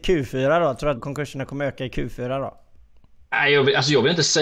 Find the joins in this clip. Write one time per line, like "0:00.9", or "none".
0:01.0
0:03.3